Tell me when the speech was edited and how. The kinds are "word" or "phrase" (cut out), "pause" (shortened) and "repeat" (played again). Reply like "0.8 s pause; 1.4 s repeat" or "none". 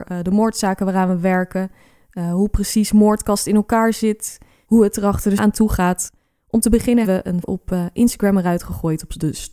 5.4 s word; 7.0 s word; 7.4 s word

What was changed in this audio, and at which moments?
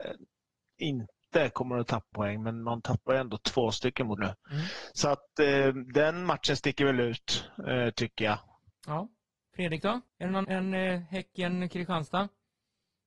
2.1 s word; 4.2 s word; 8.7 s pause; 10.1 s pause; 10.4 s word

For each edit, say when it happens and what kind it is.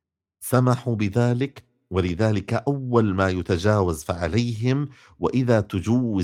none

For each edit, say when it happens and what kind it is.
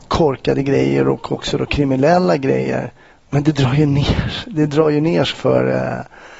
5.3 s word

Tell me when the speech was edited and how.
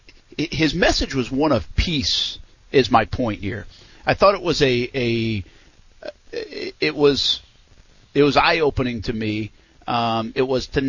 none

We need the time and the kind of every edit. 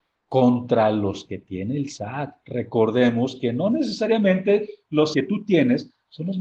5.1 s phrase

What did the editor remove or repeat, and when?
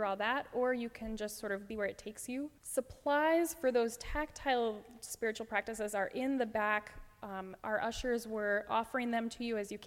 1.7 s phrase; 2.6 s pause

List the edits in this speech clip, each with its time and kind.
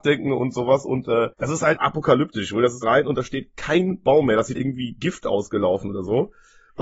1.3 s pause; 1.8 s word; 2.8 s phrase; 4.5 s phrase

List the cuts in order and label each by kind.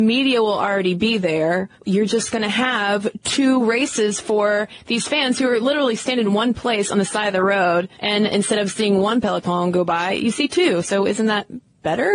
1.8 s pause; 7.9 s pause

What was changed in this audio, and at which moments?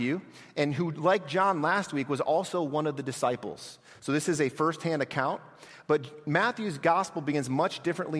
none

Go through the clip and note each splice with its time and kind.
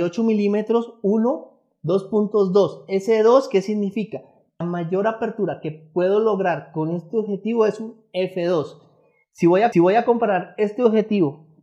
4.6 s word; 9.7 s repeat

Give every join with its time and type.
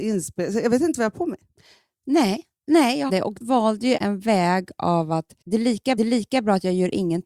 2.6 s pause; 3.1 s phrase; 3.4 s word; 4.0 s word; 5.4 s pause; 6.0 s repeat

